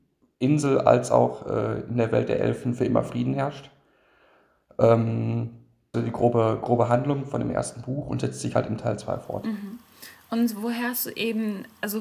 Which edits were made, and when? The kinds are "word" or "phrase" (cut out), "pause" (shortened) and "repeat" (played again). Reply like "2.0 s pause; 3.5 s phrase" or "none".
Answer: 5.9 s phrase

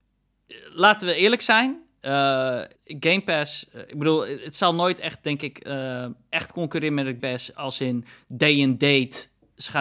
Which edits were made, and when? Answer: 2.8 s pause; 7.2 s word

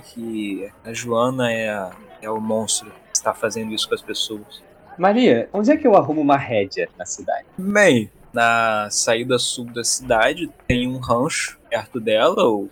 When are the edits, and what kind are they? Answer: 7.5 s pause

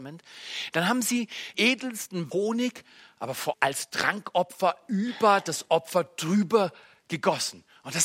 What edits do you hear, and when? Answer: 1.5 s word; 2.3 s phrase; 3.5 s phrase

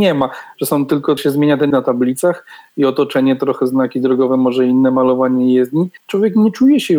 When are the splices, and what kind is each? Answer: 1.2 s word; 1.7 s word; 6.0 s pause

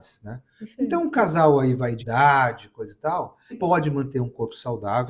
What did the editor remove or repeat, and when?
2.0 s word; 3.5 s word

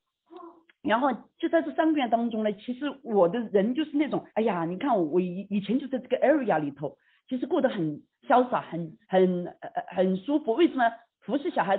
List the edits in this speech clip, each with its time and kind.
4.3 s pause; 9.0 s pause

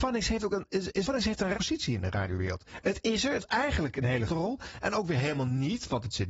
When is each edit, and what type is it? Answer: 1.0 s word; 1.5 s word; 3.4 s word; 4.3 s word

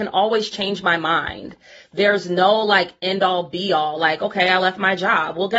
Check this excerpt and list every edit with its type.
none

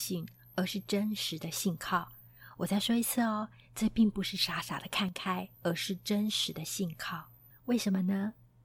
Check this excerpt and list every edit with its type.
5.5 s pause; 7.5 s pause

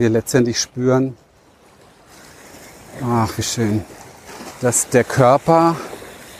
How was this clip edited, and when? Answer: none

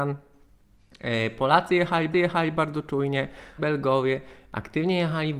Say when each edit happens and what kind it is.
2.1 s repeat; 3.6 s phrase

